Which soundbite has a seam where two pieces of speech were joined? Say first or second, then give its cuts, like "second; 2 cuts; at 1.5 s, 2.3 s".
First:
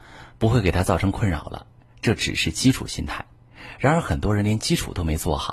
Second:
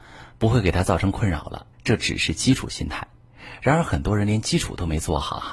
second; 1 cut; at 1.7 s